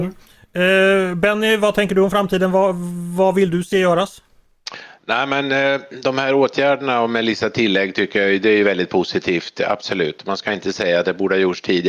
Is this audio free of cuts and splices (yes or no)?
yes